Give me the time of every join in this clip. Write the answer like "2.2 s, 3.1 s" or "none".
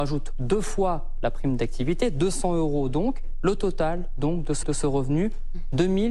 4.6 s